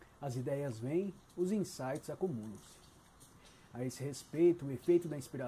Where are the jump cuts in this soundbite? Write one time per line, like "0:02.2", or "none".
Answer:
0:01.3